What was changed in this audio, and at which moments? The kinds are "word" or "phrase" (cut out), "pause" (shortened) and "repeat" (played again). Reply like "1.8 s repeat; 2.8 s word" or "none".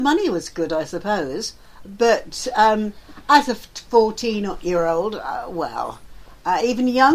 none